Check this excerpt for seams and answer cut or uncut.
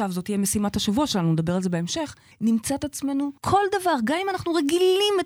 cut